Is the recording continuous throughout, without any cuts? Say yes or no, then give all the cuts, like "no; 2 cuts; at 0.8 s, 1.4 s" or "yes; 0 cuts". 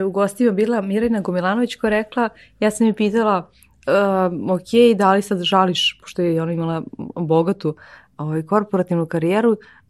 yes; 0 cuts